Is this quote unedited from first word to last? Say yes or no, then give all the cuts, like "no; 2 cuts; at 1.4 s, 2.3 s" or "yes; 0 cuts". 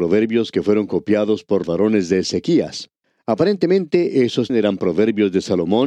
no; 2 cuts; at 1.6 s, 4.5 s